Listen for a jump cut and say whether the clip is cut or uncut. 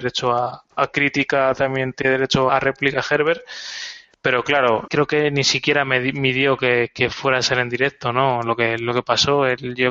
cut